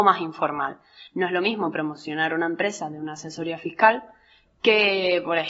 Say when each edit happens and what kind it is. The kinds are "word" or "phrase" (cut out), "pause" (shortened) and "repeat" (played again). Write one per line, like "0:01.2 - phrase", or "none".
none